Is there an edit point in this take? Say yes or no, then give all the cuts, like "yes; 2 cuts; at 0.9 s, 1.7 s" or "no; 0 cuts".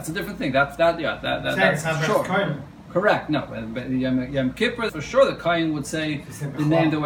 yes; 1 cut; at 4.9 s